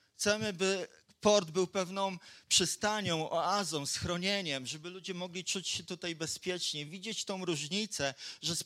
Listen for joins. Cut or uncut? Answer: uncut